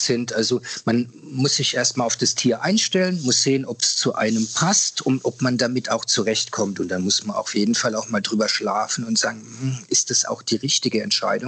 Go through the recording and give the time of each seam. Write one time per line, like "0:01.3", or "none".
none